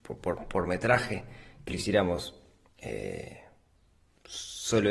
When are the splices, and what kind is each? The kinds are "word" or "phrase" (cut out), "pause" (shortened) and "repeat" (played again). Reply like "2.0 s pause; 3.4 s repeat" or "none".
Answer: 1.7 s word

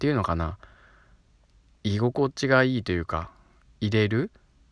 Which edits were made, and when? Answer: none

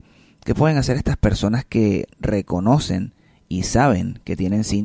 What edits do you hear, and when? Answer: 2.1 s pause

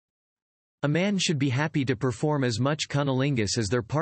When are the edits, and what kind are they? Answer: none

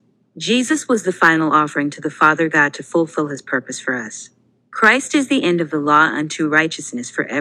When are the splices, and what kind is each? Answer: none

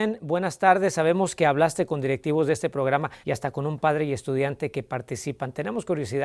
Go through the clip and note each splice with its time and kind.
3.2 s pause

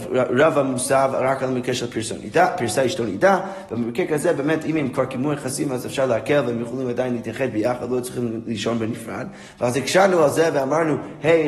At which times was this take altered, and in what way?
none

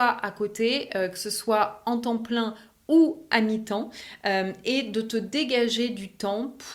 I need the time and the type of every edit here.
none

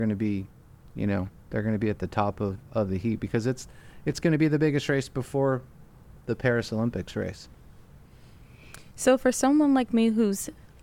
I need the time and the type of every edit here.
none

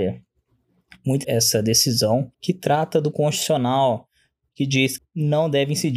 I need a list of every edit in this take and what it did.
1.2 s word; 2.3 s pause; 3.1 s word; 5.0 s word

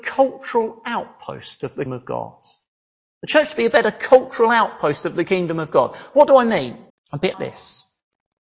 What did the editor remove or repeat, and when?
1.9 s word; 6.9 s pause; 7.3 s word

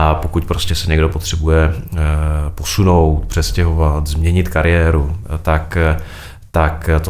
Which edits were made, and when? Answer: none

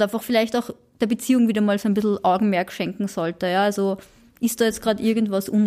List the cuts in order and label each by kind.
none

